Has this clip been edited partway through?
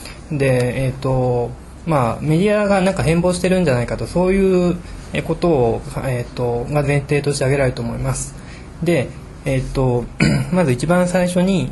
no; 0 cuts

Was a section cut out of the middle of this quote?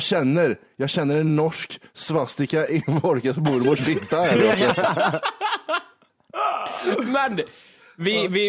no; 0 cuts

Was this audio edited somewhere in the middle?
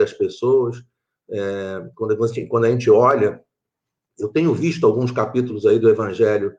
no; 0 cuts

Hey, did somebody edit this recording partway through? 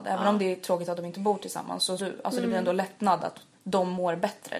yes; 2 cuts; at 2.0 s, 3.5 s

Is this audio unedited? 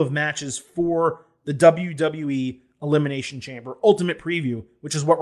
yes; 0 cuts

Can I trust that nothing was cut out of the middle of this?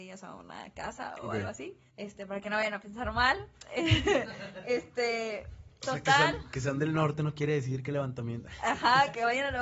no; 1 cut; at 1.9 s

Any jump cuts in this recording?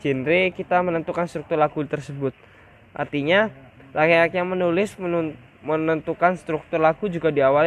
no; 0 cuts

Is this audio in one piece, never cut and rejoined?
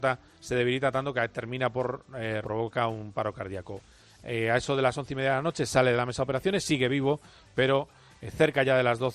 no; 1 cut; at 2.4 s

